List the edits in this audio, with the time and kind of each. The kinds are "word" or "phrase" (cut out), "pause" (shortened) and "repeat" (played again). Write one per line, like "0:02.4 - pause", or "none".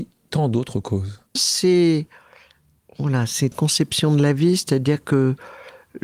0:01.4 - word
0:03.5 - word